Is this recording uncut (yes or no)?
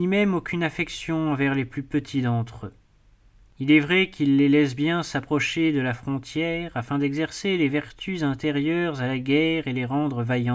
yes